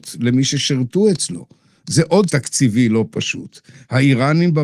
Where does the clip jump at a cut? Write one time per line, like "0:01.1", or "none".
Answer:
0:02.3